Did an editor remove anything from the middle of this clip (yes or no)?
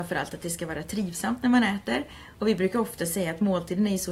no